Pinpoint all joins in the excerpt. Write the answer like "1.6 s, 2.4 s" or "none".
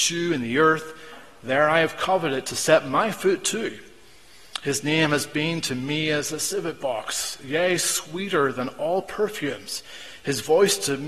none